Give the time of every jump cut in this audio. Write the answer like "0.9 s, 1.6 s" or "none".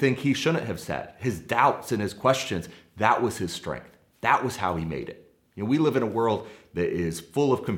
none